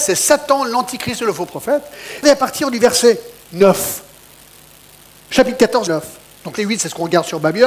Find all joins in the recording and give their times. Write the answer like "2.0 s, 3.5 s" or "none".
2.2 s, 5.9 s, 6.6 s